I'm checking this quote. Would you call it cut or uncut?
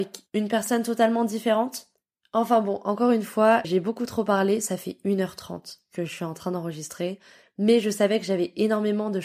cut